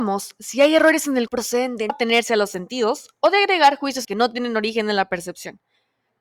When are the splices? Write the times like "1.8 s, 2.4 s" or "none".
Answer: 1.3 s, 1.9 s, 4.0 s